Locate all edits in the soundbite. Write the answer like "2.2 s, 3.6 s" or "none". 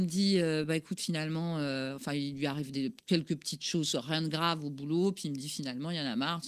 none